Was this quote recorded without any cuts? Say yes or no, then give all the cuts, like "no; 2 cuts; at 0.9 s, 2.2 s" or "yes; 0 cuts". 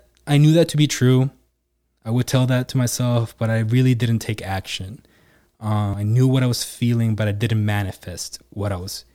yes; 0 cuts